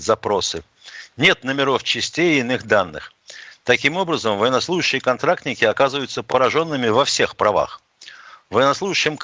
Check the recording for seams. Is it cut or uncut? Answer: uncut